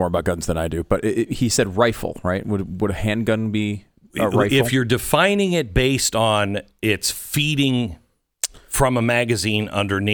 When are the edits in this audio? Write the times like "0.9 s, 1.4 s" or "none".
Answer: none